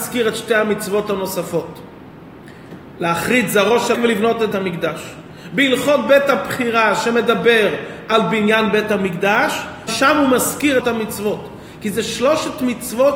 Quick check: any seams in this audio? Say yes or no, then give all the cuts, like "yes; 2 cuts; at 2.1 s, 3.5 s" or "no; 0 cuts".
yes; 4 cuts; at 3.9 s, 4.5 s, 9.9 s, 10.8 s